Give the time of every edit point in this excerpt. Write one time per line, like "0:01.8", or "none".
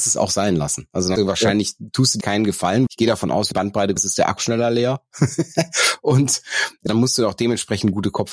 0:01.2
0:02.2
0:02.9
0:03.5
0:04.0
0:04.4
0:06.9